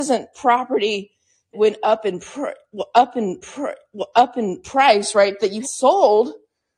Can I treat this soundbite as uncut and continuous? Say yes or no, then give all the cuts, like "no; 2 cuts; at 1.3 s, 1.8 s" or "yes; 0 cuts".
no; 3 cuts; at 1.5 s, 3.4 s, 5.6 s